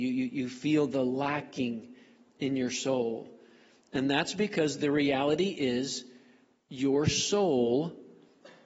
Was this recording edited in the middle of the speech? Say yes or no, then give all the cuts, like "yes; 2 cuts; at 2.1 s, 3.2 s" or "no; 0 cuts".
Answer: no; 0 cuts